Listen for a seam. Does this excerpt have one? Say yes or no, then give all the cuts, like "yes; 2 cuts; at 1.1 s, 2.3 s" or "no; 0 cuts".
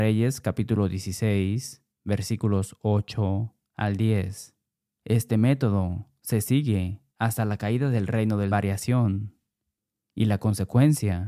yes; 4 cuts; at 1.9 s, 4.7 s, 7.1 s, 8.5 s